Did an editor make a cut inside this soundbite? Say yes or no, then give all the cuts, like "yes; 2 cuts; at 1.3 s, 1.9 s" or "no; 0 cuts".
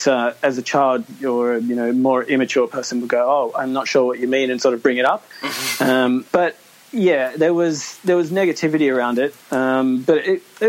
yes; 3 cuts; at 5.3 s, 6.3 s, 9.4 s